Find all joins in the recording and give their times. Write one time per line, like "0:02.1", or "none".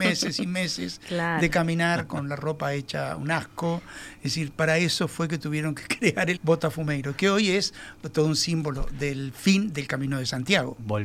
0:06.4